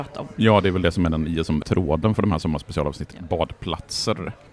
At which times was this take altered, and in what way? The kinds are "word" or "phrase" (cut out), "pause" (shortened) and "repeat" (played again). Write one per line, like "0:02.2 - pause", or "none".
0:01.6 - word
0:03.1 - word